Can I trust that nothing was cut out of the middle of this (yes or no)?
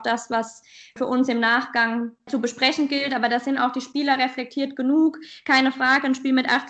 yes